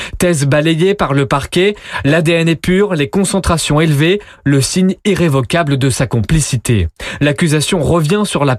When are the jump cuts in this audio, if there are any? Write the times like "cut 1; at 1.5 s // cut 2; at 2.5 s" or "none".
none